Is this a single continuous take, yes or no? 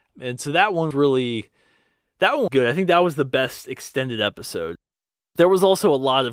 no